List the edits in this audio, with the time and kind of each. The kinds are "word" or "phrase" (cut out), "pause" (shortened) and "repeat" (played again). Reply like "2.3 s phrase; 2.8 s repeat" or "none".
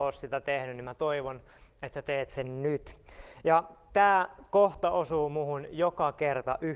none